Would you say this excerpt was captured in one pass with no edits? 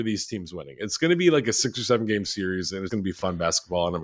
no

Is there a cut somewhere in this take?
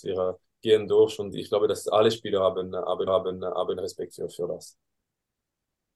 yes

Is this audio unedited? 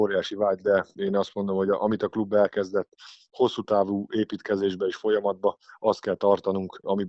yes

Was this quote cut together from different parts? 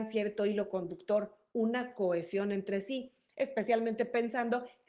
no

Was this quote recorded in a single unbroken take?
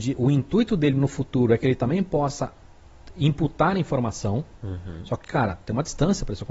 yes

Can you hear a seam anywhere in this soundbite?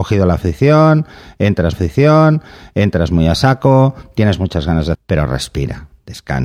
yes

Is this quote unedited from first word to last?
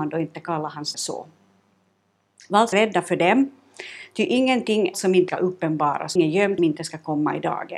no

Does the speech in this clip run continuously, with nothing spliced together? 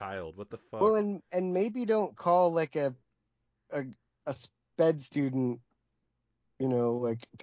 yes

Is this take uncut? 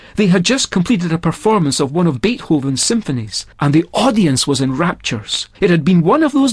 no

